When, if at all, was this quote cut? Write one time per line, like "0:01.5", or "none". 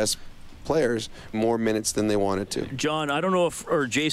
0:01.3